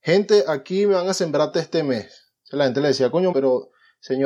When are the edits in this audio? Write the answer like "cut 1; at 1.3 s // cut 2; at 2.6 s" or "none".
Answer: cut 1; at 1.5 s // cut 2; at 3.3 s